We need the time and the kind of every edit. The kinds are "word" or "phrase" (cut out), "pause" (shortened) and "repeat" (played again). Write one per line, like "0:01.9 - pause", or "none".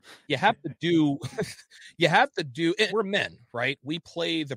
0:02.9 - word